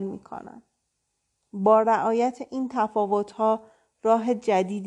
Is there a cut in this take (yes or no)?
no